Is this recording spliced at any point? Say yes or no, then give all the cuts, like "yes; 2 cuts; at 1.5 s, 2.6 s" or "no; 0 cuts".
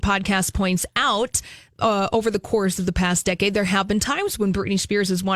no; 0 cuts